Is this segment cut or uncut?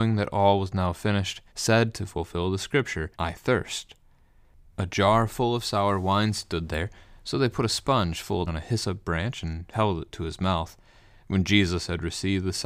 cut